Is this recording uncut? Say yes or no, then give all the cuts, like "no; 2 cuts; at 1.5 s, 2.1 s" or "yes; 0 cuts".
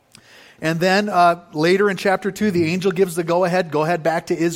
yes; 0 cuts